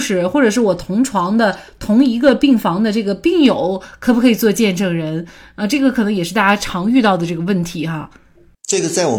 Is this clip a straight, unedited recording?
yes; 0 cuts

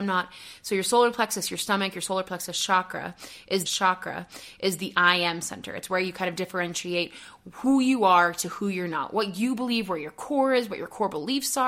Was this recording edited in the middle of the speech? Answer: yes; 1 cut; at 3.7 s

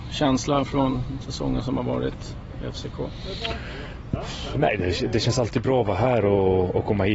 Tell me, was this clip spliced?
no; 0 cuts

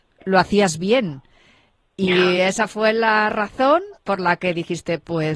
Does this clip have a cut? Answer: no; 0 cuts

